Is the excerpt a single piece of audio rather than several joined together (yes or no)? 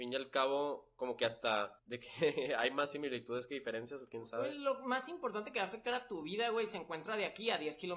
yes